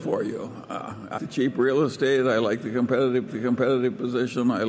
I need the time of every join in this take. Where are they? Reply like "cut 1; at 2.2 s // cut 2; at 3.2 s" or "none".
cut 1; at 1.2 s // cut 2; at 3.3 s